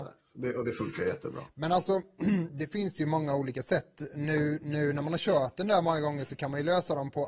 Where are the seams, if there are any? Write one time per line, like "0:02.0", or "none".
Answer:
none